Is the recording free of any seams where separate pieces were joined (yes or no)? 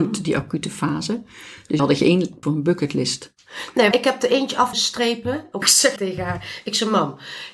no